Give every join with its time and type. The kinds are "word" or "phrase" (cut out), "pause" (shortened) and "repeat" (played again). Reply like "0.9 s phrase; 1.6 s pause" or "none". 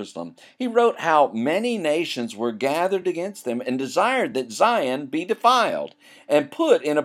none